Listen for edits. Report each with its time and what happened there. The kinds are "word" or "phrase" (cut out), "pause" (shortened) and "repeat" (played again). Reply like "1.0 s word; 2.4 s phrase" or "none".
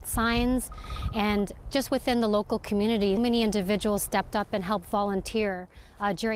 1.7 s word; 3.2 s word